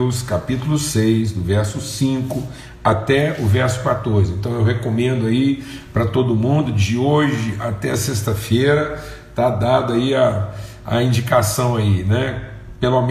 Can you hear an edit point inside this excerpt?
no; 0 cuts

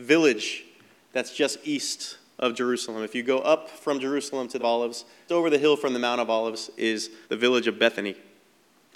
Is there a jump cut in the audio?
yes; 3 cuts; at 4.6 s, 5.3 s, 7.2 s

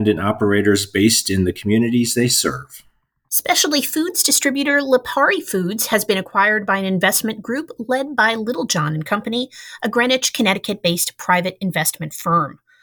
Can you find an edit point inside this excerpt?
no; 0 cuts

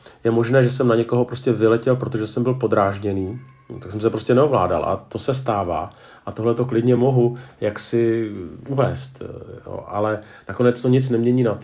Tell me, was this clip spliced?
no; 0 cuts

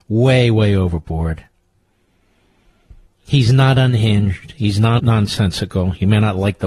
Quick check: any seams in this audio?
yes; 2 cuts; at 3.1 s, 5.0 s

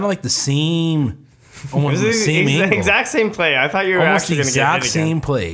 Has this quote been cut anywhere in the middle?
no; 0 cuts

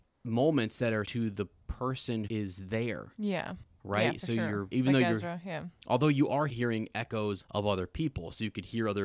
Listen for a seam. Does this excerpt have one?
yes; 5 cuts; at 1.0 s, 2.3 s, 4.7 s, 6.5 s, 7.4 s

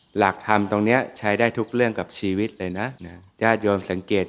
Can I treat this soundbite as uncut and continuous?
no; 2 cuts; at 3.0 s, 3.3 s

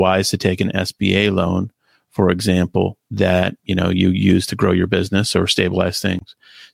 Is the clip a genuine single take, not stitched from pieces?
yes; 0 cuts

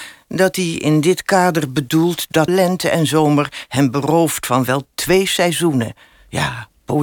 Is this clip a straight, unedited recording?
no; 1 cut; at 2.5 s

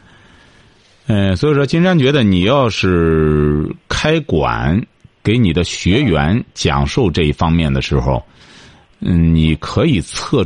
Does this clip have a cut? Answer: no; 0 cuts

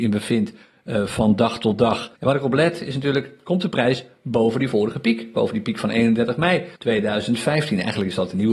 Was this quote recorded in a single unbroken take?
no; 2 cuts; at 2.2 s, 6.8 s

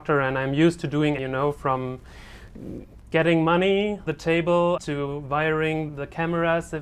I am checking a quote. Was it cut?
yes; 4 cuts; at 1.2 s, 4.1 s, 4.8 s, 5.9 s

